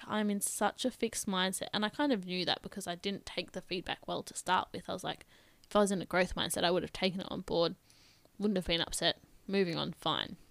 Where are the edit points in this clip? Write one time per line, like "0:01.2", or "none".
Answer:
none